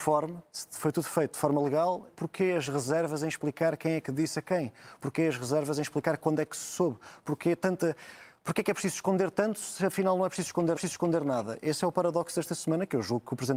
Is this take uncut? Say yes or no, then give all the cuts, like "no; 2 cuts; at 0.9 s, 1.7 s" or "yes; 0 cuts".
no; 2 cuts; at 2.1 s, 10.8 s